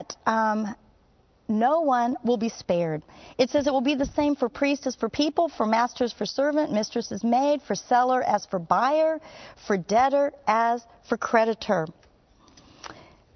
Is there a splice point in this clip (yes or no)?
no